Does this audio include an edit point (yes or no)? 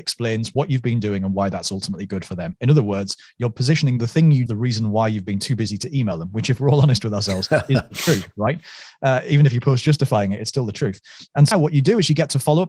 yes